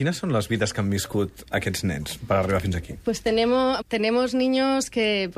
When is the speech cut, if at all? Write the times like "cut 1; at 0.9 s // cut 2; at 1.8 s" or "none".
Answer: cut 1; at 3.8 s

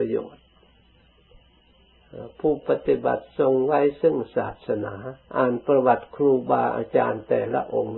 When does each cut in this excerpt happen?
cut 1; at 5.2 s

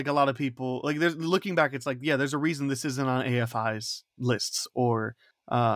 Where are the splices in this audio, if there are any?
cut 1; at 4.1 s

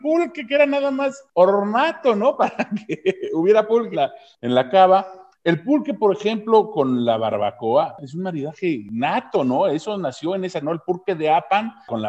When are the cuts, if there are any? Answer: cut 1; at 3.9 s // cut 2; at 10.6 s

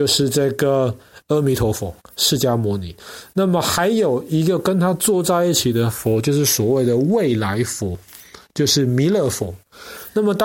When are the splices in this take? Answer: cut 1; at 2.0 s

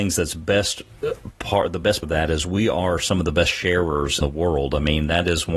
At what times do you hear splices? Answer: cut 1; at 2.0 s // cut 2; at 4.2 s

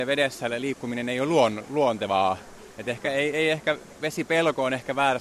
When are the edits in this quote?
none

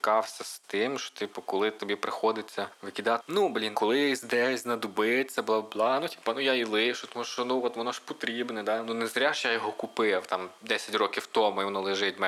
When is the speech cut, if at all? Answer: cut 1; at 3.2 s // cut 2; at 3.7 s

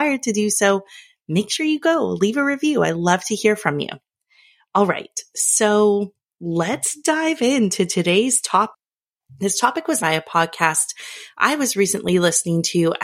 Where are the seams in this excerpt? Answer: cut 1; at 10.0 s

